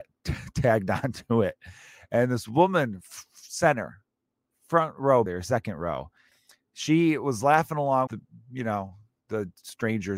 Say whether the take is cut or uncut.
cut